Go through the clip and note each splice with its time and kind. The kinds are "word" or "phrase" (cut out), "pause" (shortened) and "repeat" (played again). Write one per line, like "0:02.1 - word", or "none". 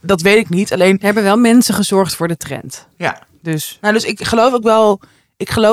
none